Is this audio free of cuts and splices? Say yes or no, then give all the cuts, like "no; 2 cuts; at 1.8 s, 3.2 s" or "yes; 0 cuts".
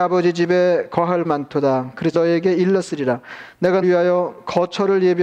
no; 3 cuts; at 1.2 s, 2.1 s, 3.8 s